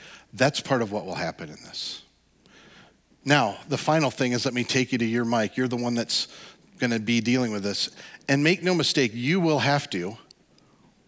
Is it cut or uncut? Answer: uncut